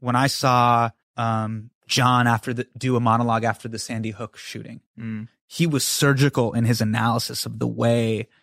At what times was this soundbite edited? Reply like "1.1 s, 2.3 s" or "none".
1.0 s